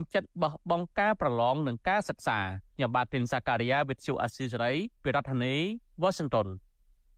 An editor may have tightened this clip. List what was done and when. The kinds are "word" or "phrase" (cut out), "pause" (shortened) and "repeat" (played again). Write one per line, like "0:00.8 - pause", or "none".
0:02.7 - pause
0:04.9 - pause